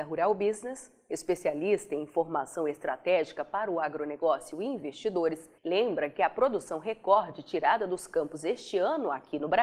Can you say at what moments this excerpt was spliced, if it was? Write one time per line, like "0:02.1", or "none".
0:05.6